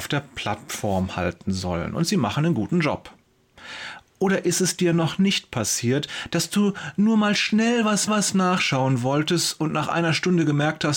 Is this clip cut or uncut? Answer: cut